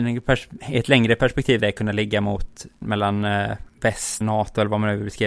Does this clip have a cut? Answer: yes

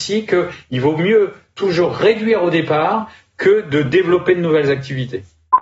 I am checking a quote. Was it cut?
no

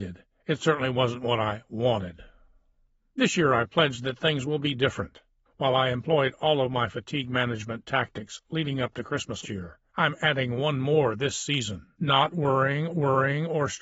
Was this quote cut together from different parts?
yes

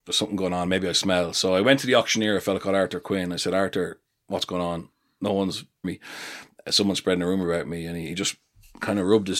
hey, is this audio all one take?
no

